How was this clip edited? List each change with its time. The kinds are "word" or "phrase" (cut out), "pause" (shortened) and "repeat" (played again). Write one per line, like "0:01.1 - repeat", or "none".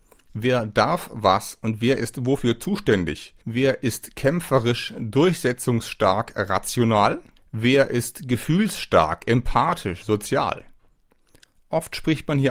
0:03.4 - pause
0:07.4 - pause